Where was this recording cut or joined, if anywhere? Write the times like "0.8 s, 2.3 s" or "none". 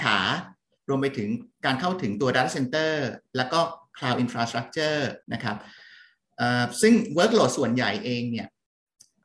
1.5 s, 5.2 s